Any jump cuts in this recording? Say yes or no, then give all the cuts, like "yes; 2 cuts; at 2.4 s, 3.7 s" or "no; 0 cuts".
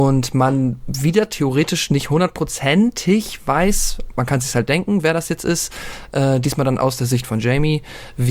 no; 0 cuts